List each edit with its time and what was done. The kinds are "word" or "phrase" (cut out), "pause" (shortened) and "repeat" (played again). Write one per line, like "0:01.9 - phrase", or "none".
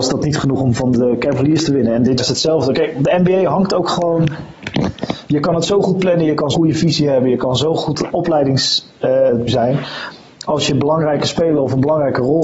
0:02.2 - word
0:06.5 - word
0:09.5 - word